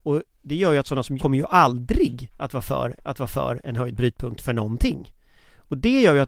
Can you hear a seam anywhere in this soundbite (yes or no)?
yes